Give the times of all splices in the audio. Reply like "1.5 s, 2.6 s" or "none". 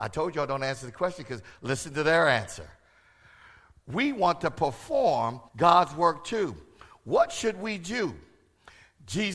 5.5 s